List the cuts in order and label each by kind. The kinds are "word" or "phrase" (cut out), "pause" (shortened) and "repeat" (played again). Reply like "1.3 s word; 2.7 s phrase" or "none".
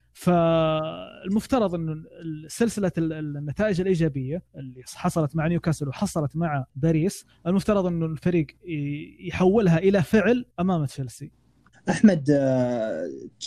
4.5 s pause; 6.7 s pause; 10.5 s pause